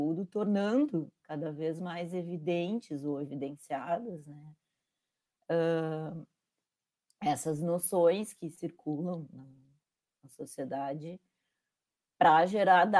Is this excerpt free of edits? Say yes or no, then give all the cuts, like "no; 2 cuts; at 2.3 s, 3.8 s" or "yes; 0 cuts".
no; 1 cut; at 1.2 s